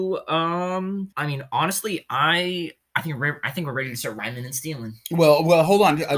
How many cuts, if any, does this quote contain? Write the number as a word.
one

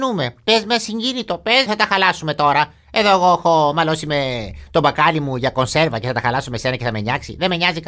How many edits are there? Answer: one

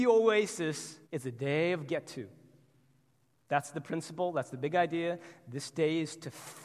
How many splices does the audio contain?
one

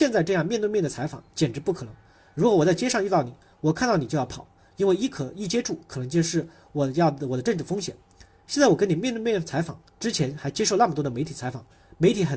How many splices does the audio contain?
zero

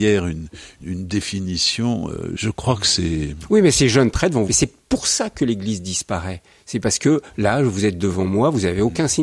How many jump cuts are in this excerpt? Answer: one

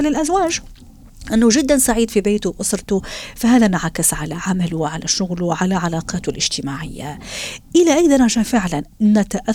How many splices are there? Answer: zero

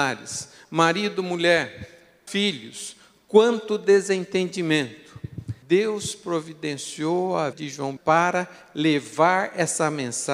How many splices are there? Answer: four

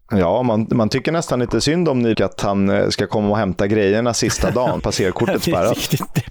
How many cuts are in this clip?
two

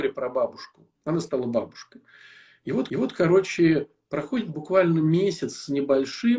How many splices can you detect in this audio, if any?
two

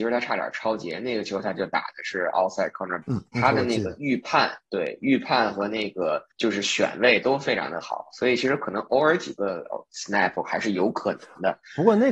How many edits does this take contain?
two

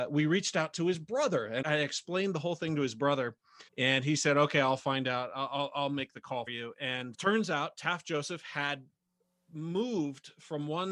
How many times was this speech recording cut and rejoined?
four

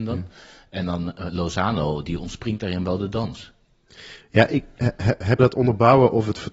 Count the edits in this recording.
one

